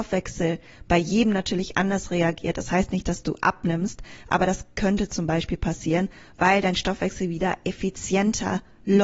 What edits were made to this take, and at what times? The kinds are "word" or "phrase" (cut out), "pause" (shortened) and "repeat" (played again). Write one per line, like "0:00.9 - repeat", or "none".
none